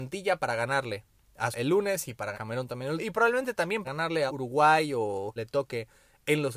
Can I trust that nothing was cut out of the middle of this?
no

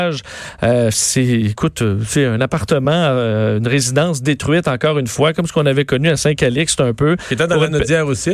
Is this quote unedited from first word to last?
yes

